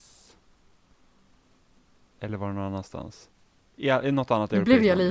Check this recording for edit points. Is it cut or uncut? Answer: uncut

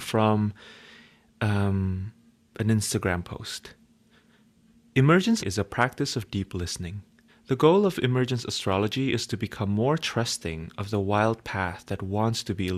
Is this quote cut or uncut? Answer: cut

